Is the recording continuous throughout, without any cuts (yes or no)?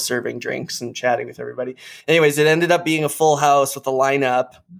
no